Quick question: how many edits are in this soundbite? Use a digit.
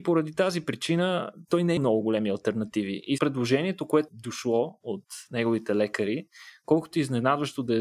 3